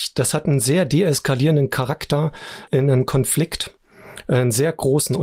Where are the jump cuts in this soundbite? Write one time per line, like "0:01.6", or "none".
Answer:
0:02.7

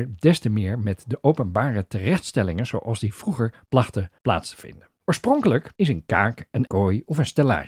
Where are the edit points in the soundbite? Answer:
0:04.2
0:05.8
0:06.7

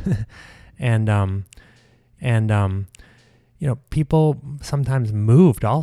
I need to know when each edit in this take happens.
0:02.2

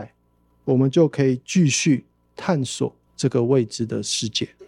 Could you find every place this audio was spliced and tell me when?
0:03.1

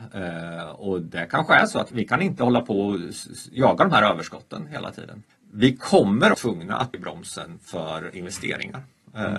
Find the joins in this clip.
0:01.9
0:05.3
0:06.3
0:06.9

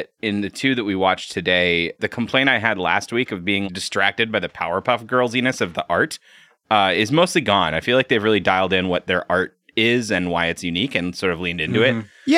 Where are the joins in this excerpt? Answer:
0:02.0
0:03.6

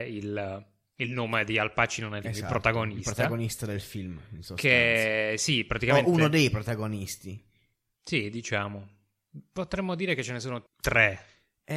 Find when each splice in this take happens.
0:02.2
0:10.7

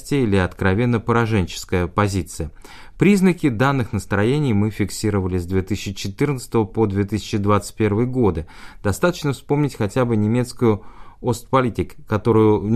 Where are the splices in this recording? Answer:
none

